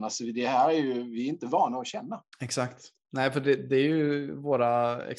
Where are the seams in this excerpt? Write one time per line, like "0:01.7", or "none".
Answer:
0:02.3